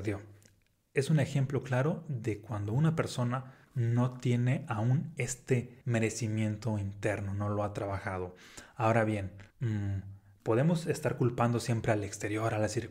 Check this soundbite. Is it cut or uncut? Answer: cut